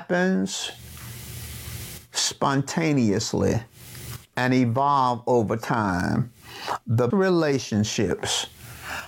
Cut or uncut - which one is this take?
cut